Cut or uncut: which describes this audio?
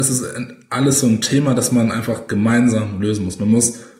uncut